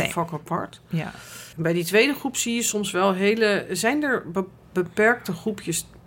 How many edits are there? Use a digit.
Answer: 1